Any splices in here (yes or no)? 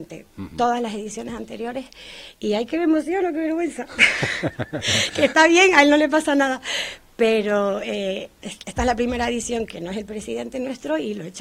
no